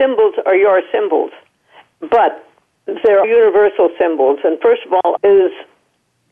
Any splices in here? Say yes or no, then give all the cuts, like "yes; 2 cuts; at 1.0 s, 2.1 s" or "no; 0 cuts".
yes; 2 cuts; at 3.2 s, 5.2 s